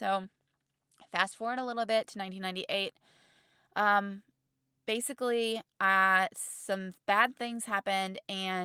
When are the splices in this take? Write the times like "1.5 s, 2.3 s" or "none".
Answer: 7.0 s